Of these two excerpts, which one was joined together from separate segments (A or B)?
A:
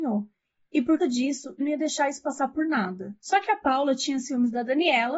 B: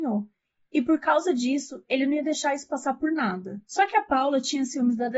A